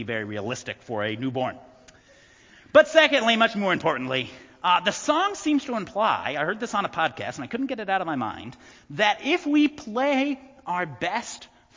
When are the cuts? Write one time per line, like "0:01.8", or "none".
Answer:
none